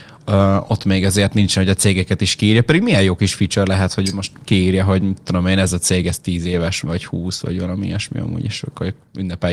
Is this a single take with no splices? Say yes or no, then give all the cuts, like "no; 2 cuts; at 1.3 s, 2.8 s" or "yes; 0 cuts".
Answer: no; 1 cut; at 6.8 s